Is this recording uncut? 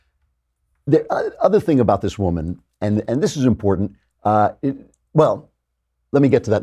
yes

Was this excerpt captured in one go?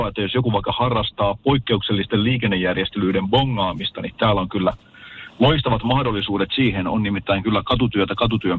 yes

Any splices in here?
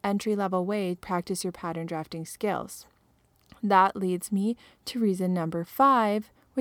yes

